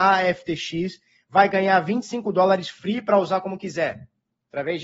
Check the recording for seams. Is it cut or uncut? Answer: uncut